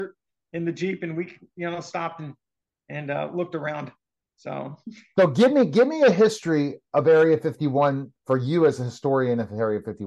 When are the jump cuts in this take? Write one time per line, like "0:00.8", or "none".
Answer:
none